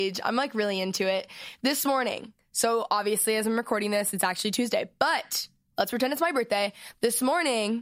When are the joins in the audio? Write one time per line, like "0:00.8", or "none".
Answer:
none